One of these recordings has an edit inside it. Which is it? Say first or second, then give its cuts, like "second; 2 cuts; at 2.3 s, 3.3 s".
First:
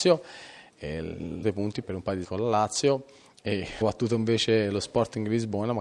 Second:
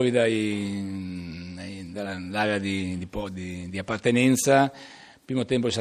first; 4 cuts; at 1.4 s, 1.8 s, 2.2 s, 3.8 s